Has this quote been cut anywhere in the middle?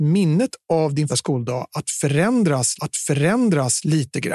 yes; 2 cuts; at 1.1 s, 2.8 s

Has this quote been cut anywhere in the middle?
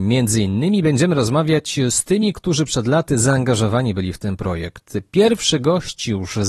no; 0 cuts

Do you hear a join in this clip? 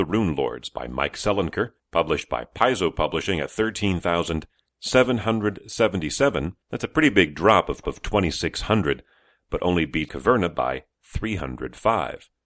yes; 4 cuts; at 1.8 s, 6.6 s, 7.8 s, 10.1 s

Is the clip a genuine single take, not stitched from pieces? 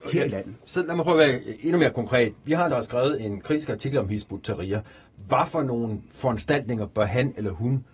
no; 1 cut; at 2.7 s

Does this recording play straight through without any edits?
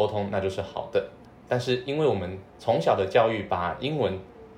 no; 2 cuts; at 1.2 s, 2.5 s

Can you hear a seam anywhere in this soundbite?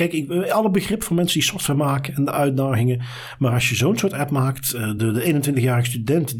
no; 0 cuts

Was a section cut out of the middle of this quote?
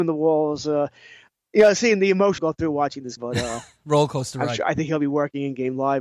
yes; 2 cuts; at 2.4 s, 3.2 s

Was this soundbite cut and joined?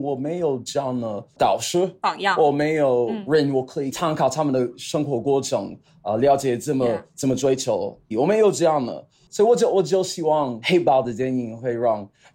yes; 1 cut; at 8.1 s

